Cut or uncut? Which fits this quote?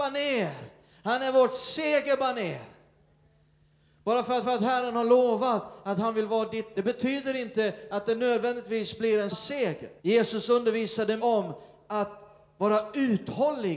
cut